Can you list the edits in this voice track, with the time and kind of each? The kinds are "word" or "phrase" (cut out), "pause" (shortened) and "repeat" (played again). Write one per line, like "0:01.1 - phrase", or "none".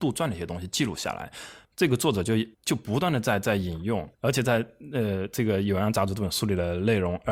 0:02.5 - pause
0:04.1 - pause